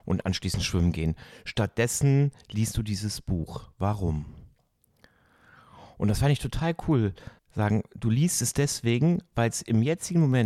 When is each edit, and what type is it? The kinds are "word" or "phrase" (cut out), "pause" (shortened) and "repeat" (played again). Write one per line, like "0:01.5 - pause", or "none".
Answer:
0:07.4 - pause